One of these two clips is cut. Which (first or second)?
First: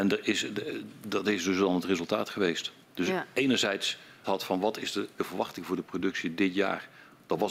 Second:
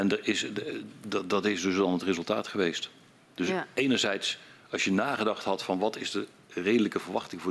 first